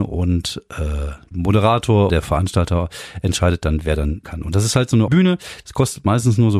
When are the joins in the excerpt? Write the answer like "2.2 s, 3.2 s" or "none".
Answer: 1.3 s, 2.1 s, 4.2 s, 5.1 s